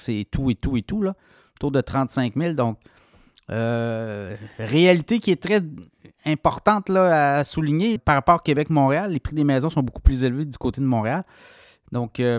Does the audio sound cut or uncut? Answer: cut